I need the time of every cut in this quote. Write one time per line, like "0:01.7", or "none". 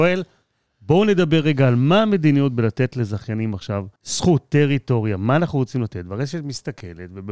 0:04.0